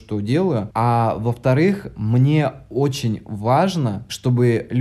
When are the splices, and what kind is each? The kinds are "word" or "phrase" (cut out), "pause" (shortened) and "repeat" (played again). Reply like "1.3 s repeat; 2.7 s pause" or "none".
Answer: none